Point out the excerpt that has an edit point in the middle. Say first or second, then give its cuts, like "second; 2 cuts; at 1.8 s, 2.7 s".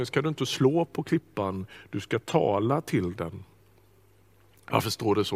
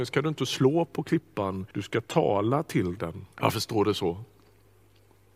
second; 2 cuts; at 1.7 s, 3.3 s